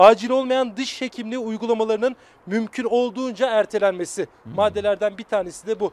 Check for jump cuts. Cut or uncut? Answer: uncut